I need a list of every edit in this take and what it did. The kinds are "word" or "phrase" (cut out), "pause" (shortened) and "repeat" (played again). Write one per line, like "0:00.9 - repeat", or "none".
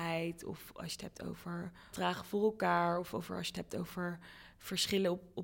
0:01.9 - word